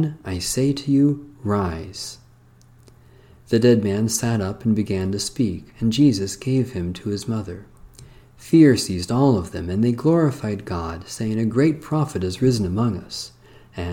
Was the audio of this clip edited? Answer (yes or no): no